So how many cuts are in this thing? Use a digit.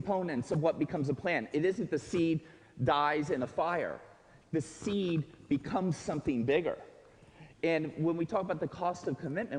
0